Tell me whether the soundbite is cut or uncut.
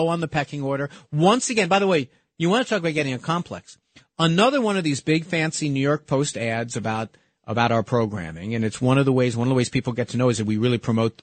uncut